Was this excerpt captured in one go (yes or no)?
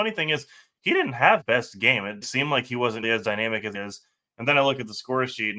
no